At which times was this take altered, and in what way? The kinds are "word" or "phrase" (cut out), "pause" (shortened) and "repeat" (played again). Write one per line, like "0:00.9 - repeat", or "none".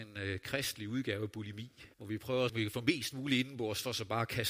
0:01.9 - pause
0:02.5 - word